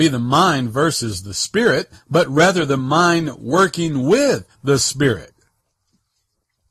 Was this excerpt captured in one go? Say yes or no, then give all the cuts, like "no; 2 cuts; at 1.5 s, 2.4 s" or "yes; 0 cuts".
yes; 0 cuts